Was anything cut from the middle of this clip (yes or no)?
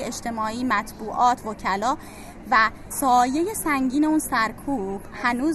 no